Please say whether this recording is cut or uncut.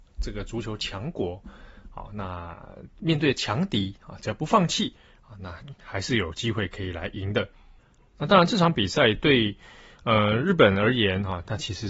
uncut